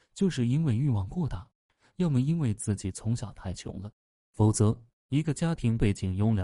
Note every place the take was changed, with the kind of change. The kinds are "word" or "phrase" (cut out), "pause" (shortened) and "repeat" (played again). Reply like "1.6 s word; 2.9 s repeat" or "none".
none